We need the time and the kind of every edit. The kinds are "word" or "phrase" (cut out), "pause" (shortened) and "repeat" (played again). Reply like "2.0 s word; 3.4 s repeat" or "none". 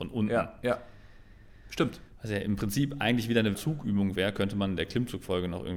3.5 s word